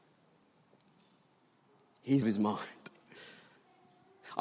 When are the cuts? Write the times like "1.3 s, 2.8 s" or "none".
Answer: 2.2 s